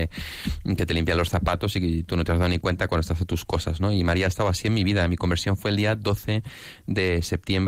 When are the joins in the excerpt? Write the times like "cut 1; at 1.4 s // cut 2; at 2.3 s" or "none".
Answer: none